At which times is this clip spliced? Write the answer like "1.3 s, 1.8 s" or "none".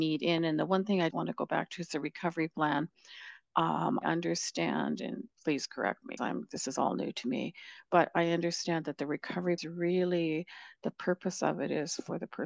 1.1 s, 4.0 s, 5.3 s, 6.2 s, 9.6 s